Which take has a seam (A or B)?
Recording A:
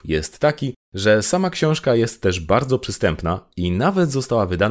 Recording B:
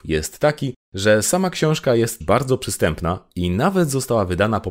B